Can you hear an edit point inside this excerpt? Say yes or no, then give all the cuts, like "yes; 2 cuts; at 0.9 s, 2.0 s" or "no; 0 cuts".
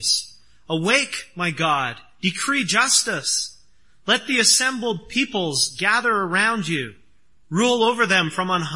no; 0 cuts